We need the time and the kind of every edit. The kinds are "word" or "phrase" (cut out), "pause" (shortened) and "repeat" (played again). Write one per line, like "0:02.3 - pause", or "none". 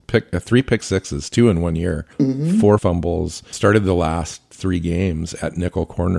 0:02.1 - pause
0:02.8 - word
0:03.5 - word